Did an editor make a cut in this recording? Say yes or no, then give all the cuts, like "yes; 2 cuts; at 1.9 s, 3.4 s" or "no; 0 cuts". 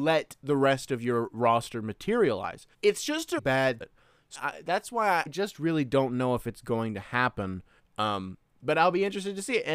yes; 6 cuts; at 2.7 s, 3.4 s, 3.8 s, 4.3 s, 5.3 s, 7.8 s